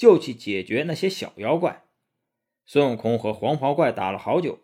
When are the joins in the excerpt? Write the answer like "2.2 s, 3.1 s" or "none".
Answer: none